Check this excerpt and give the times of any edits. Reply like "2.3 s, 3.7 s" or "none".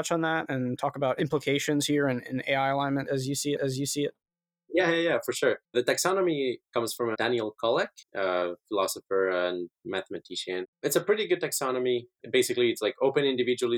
3.6 s, 5.6 s, 8.0 s, 10.7 s